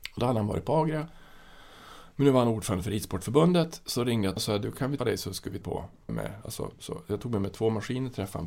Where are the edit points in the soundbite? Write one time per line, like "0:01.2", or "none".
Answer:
0:04.4
0:05.0
0:05.6
0:06.1